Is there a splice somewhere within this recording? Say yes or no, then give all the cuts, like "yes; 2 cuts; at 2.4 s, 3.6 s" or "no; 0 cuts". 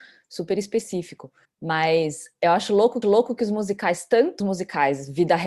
yes; 3 cuts; at 1.4 s, 3.0 s, 4.4 s